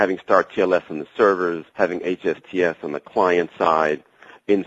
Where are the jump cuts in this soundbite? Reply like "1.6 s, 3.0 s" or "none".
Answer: 1.7 s